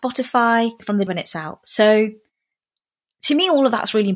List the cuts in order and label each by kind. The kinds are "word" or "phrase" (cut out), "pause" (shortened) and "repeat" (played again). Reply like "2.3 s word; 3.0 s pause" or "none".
1.1 s word